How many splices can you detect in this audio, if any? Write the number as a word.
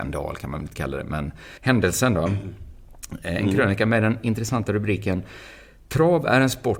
one